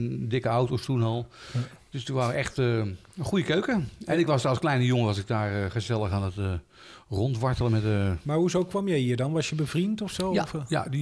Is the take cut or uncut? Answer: uncut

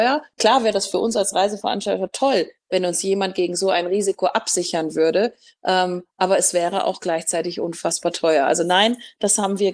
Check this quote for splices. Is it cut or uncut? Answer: uncut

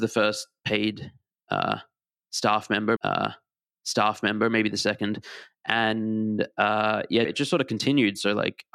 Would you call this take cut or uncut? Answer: cut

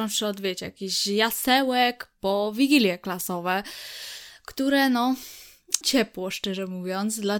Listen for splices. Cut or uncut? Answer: cut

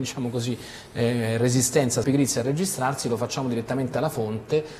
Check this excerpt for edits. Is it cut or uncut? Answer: cut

